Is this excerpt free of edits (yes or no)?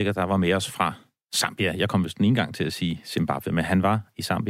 yes